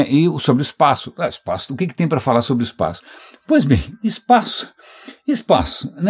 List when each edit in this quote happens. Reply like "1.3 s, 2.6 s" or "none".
none